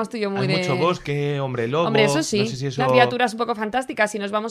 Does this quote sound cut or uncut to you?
cut